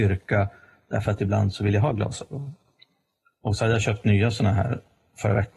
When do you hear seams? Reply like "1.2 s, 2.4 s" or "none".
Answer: none